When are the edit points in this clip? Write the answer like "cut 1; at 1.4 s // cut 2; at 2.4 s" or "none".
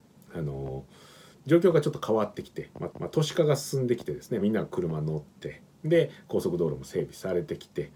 cut 1; at 2.9 s // cut 2; at 4.4 s